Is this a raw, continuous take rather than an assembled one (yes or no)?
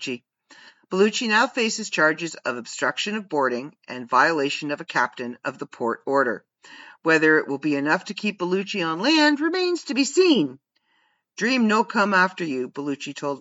yes